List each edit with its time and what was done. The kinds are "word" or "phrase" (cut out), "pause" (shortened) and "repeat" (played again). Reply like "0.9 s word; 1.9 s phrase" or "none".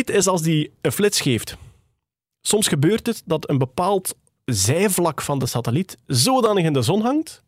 none